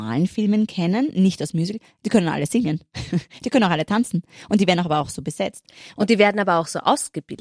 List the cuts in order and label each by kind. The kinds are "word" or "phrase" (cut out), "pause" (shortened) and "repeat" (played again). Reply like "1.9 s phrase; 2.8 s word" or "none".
none